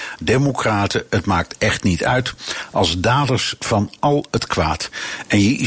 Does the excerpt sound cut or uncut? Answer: uncut